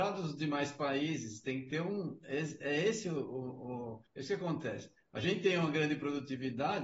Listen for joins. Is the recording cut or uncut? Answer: cut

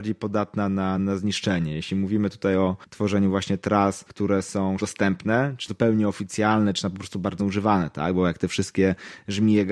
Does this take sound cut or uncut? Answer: cut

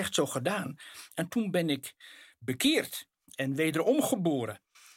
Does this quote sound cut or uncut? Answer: uncut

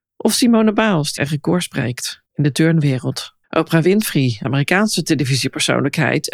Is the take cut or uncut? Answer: cut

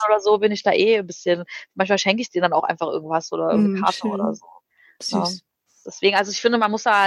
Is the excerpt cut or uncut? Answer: uncut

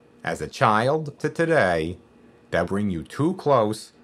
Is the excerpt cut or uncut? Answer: cut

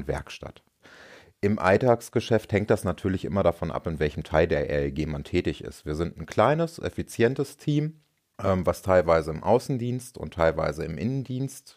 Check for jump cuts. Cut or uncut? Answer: uncut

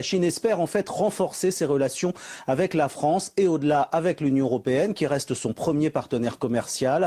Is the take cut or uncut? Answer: uncut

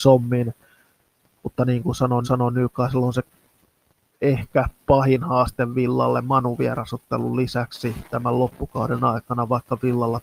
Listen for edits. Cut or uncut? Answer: cut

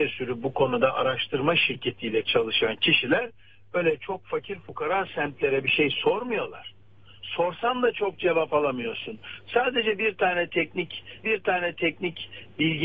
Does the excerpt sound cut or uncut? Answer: cut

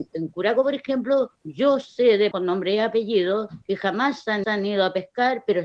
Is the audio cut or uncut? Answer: cut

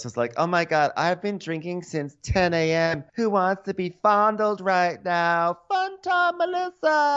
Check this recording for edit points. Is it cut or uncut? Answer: cut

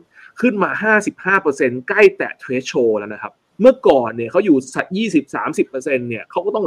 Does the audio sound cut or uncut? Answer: cut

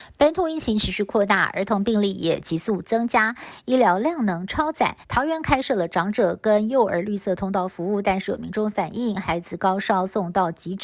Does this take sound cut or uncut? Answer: cut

